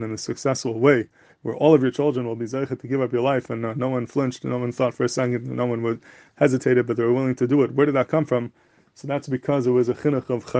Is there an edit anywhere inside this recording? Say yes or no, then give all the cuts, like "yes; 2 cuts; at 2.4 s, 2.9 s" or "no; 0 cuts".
no; 0 cuts